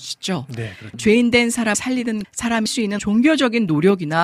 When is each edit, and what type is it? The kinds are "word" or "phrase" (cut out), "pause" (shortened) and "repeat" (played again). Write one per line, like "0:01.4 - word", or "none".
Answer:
0:00.9 - word
0:01.7 - word
0:02.2 - word
0:02.7 - word
0:03.0 - word

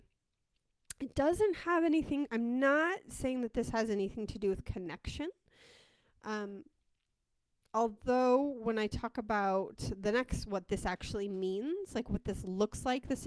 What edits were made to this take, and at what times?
none

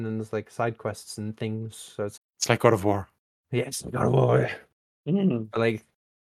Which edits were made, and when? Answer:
0:02.2 - word

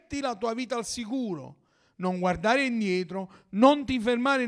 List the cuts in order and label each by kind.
none

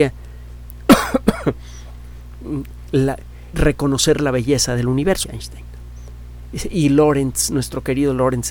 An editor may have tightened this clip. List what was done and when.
0:03.5 - word
0:05.2 - phrase

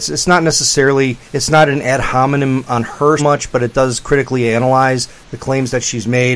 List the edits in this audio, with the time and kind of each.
0:01.3 - pause
0:03.2 - word

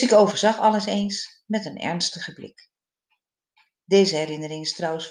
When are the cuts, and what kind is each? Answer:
none

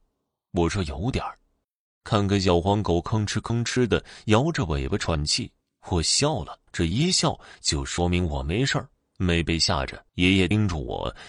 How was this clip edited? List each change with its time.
0:01.6 - pause
0:05.6 - pause
0:06.7 - pause
0:10.1 - pause

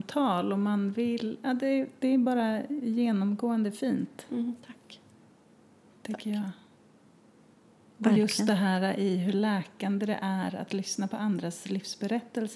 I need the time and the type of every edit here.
none

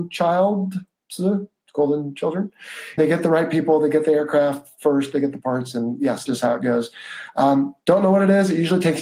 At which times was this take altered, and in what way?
0:03.0 - word
0:06.3 - phrase
0:07.8 - pause

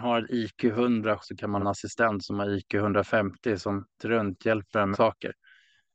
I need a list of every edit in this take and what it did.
0:01.2 - word
0:01.6 - word
0:04.0 - word
0:04.9 - word

